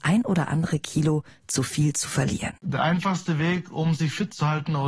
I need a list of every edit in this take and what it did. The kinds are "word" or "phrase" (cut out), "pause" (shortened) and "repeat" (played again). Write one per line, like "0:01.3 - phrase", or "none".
0:02.6 - pause